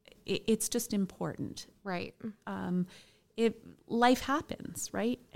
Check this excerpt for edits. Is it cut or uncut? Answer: uncut